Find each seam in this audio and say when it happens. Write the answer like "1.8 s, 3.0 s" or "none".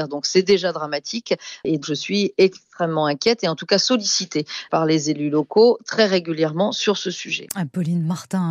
1.8 s